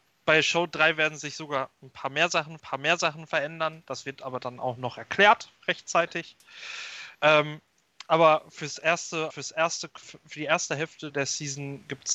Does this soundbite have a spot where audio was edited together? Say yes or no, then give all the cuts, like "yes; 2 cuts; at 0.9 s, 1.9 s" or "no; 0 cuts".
yes; 5 cuts; at 2.6 s, 7.1 s, 9.3 s, 10.0 s, 11.1 s